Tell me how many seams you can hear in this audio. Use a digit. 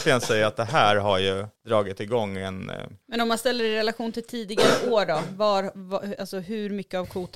2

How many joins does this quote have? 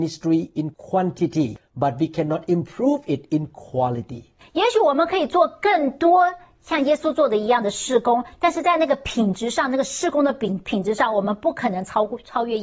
0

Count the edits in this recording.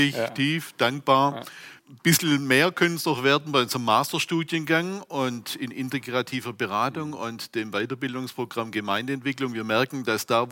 1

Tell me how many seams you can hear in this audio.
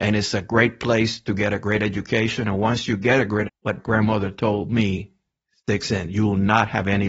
2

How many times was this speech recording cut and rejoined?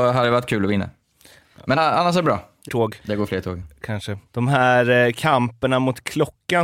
4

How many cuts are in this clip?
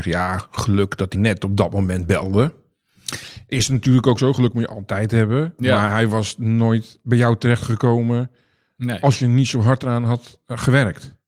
1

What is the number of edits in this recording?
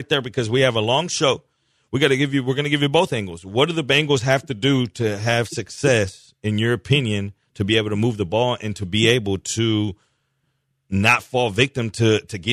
0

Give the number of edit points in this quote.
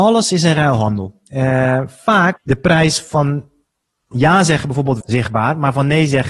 3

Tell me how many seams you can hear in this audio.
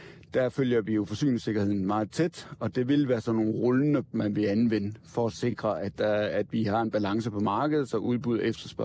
1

